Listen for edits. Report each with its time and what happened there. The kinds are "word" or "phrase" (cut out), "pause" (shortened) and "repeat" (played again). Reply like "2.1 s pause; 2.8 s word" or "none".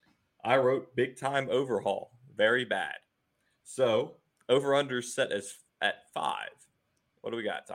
none